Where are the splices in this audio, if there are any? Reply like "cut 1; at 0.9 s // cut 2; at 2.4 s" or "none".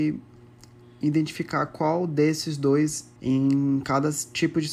cut 1; at 3.2 s